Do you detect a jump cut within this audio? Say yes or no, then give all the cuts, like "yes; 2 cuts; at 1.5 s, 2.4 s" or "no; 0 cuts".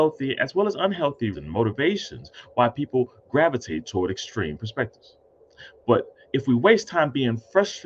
yes; 1 cut; at 1.3 s